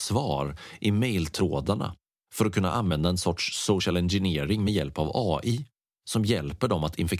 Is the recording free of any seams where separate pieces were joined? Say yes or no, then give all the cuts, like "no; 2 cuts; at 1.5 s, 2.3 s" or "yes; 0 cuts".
yes; 0 cuts